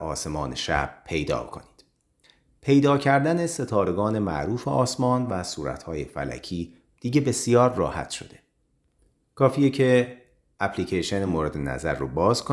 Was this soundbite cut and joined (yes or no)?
no